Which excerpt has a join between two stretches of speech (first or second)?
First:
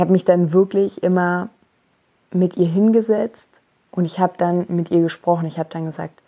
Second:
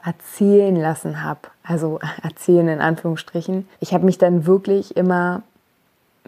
second